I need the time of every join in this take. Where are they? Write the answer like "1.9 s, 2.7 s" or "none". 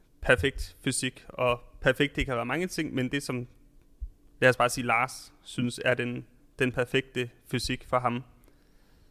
none